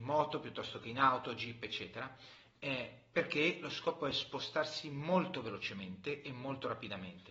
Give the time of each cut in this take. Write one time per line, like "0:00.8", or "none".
none

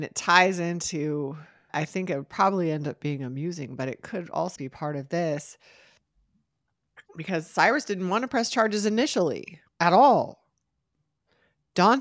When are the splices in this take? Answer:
0:01.7
0:04.6
0:07.1
0:09.7

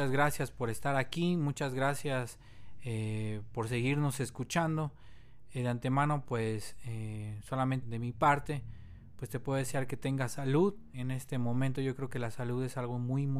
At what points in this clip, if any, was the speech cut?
0:07.8
0:10.9

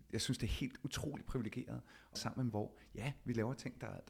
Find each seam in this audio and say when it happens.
0:02.2
0:02.5

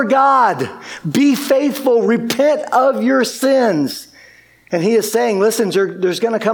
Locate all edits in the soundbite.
none

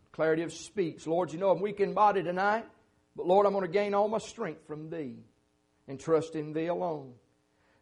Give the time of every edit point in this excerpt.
none

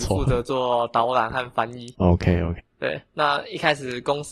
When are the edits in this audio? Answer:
0:02.6

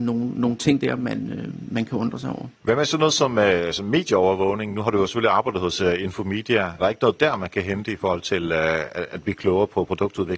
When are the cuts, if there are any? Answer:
0:02.6
0:06.8

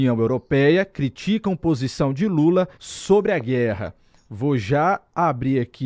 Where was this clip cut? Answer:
0:02.7

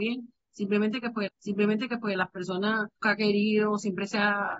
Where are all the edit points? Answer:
0:01.3
0:03.0

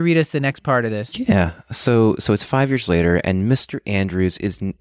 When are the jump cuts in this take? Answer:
none

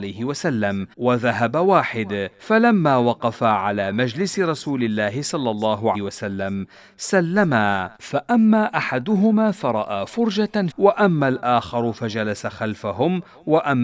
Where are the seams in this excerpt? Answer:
0:00.9
0:02.3
0:05.9
0:08.0
0:10.7

